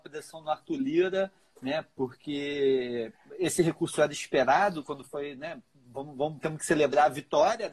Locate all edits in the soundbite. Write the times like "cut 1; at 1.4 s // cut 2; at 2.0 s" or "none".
none